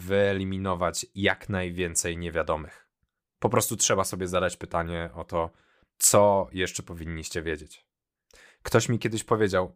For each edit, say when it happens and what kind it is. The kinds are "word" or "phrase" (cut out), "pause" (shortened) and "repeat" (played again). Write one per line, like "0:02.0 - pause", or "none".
none